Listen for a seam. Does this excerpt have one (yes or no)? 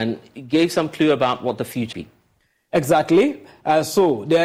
yes